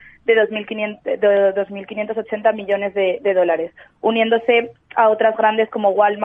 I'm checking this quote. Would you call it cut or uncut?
uncut